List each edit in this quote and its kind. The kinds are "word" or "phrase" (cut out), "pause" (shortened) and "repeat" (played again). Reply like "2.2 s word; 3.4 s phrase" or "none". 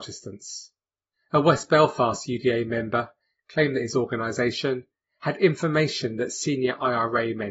none